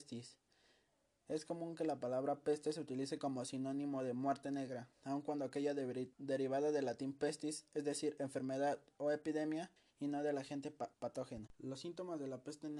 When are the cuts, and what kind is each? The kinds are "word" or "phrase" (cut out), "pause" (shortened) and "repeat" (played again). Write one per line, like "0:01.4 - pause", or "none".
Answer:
0:04.9 - pause
0:06.1 - pause
0:09.8 - pause
0:10.9 - pause

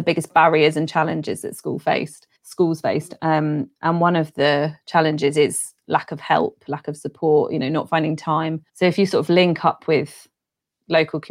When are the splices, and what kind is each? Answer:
0:02.4 - pause
0:08.7 - pause

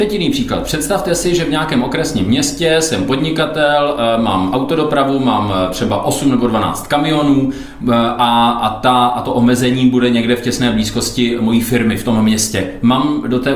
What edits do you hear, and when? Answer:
none

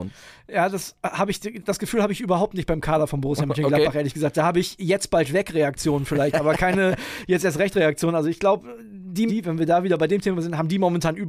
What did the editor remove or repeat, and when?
0:09.3 - phrase

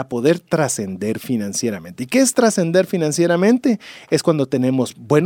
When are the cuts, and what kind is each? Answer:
none

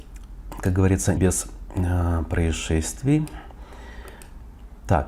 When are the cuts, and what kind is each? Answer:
0:01.2 - word

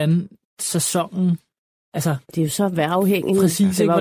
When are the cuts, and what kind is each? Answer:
0:02.2 - pause

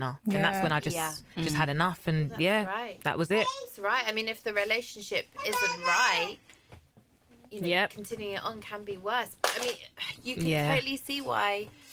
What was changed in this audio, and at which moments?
0:01.3 - pause

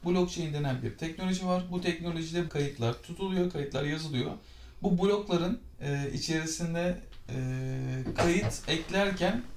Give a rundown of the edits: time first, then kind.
0:02.5 - word

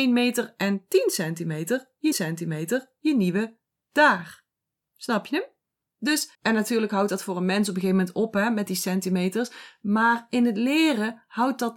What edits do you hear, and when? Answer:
0:02.1 - repeat
0:06.3 - pause

